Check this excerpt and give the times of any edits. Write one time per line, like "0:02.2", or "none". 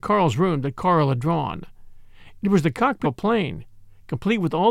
0:03.0